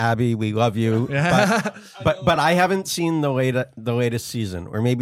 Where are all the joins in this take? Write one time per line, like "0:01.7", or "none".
none